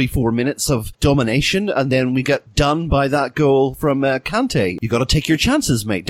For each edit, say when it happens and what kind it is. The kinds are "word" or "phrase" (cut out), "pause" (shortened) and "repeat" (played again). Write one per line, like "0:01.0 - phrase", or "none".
none